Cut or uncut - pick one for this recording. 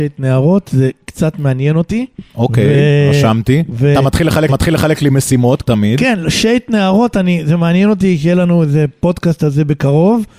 cut